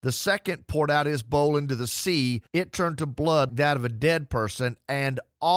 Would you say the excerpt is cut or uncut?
cut